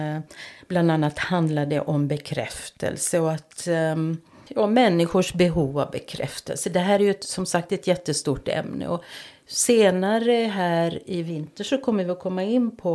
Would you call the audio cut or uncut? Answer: uncut